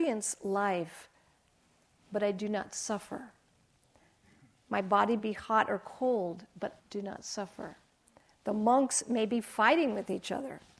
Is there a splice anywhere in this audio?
yes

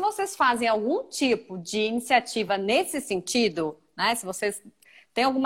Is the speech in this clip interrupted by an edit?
no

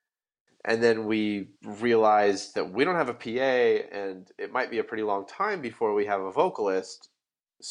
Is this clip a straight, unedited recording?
no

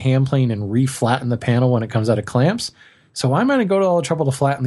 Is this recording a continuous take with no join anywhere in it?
yes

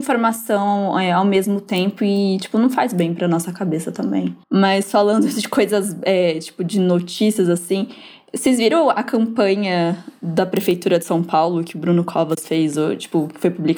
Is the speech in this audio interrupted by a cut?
yes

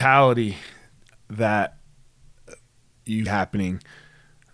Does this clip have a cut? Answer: yes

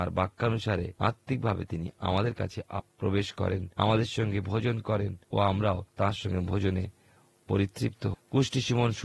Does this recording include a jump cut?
yes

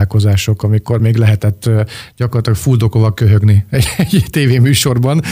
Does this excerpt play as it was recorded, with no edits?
yes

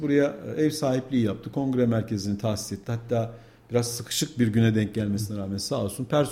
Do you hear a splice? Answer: no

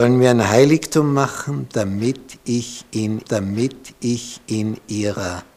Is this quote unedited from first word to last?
no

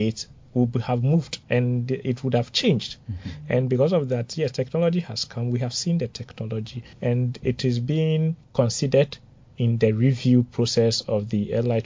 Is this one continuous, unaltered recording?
no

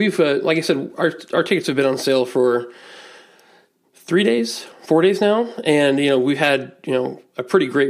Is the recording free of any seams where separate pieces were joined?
yes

